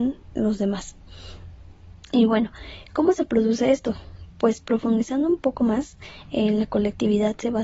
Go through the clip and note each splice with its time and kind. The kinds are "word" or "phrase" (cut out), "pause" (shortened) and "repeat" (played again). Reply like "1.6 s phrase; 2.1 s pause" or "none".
none